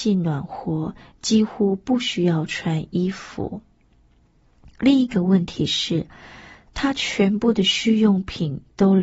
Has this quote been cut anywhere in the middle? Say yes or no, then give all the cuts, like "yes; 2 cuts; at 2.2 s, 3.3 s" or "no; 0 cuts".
no; 0 cuts